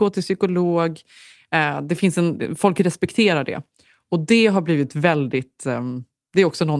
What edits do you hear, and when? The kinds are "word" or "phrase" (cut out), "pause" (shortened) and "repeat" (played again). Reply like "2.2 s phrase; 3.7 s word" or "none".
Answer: none